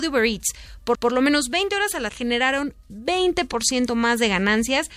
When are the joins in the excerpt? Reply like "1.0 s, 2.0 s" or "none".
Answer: 0.9 s, 2.1 s